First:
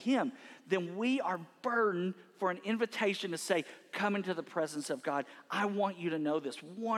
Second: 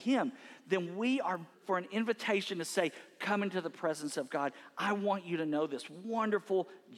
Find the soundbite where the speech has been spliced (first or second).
second